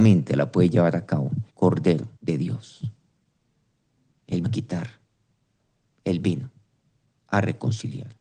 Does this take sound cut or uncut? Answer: cut